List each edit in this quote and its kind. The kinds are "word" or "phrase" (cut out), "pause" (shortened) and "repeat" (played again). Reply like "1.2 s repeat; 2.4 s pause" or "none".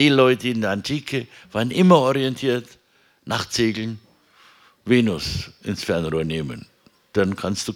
none